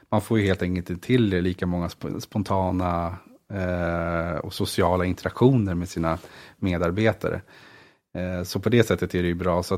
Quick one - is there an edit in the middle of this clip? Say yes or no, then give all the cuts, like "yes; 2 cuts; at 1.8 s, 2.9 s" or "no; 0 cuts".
no; 0 cuts